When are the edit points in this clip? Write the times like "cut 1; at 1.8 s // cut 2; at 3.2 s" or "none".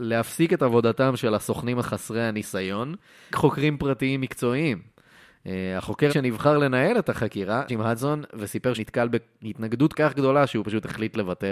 cut 1; at 1.8 s // cut 2; at 3.3 s // cut 3; at 6.1 s // cut 4; at 7.7 s // cut 5; at 8.7 s // cut 6; at 9.9 s